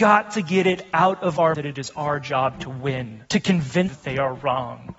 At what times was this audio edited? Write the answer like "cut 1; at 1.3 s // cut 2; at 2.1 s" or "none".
cut 1; at 1.5 s // cut 2; at 3.3 s // cut 3; at 3.9 s